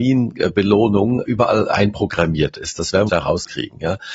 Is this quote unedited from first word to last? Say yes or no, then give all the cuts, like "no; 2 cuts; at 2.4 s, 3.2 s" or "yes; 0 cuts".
no; 2 cuts; at 1.2 s, 3.1 s